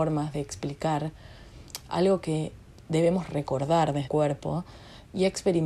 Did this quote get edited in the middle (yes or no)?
yes